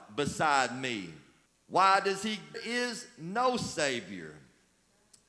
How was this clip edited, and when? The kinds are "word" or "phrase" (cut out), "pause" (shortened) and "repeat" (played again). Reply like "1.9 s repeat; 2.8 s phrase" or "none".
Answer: 1.5 s pause; 2.5 s phrase